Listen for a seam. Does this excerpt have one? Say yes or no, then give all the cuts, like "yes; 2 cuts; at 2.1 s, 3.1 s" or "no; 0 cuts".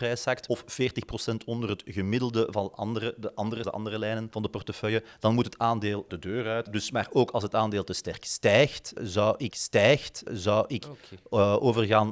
yes; 2 cuts; at 3.6 s, 9.5 s